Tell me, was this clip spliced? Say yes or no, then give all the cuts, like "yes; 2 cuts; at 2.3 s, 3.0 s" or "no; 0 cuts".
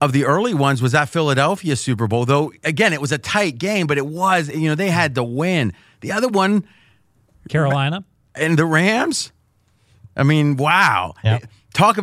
no; 0 cuts